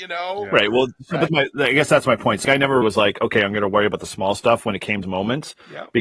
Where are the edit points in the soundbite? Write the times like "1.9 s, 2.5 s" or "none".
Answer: 1.3 s, 2.4 s, 2.8 s, 5.0 s